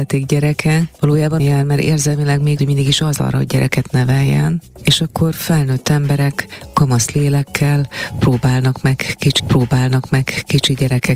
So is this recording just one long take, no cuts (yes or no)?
no